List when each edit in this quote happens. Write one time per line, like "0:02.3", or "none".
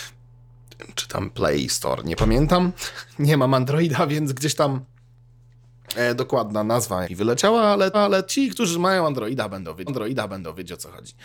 0:07.0
0:07.9
0:09.9